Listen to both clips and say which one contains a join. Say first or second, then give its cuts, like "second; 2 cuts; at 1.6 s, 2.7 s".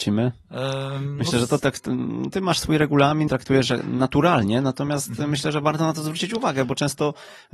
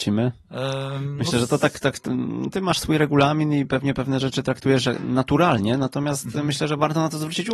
first; 2 cuts; at 1.6 s, 3.3 s